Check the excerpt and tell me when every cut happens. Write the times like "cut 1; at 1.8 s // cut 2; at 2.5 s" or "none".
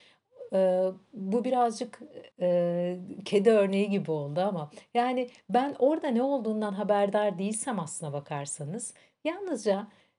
cut 1; at 2.3 s